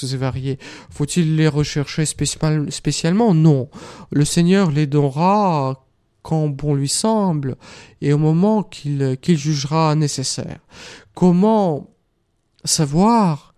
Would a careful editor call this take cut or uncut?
uncut